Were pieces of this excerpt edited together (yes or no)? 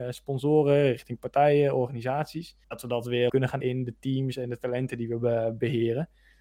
yes